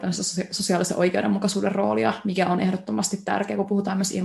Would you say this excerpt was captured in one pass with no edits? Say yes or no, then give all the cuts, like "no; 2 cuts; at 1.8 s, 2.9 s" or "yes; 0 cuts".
yes; 0 cuts